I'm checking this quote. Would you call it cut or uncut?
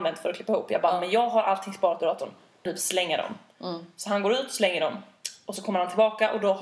cut